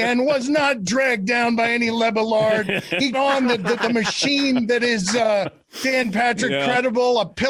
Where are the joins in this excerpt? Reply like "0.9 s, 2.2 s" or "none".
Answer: 3.1 s, 3.8 s